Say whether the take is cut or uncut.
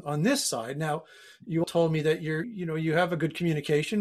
cut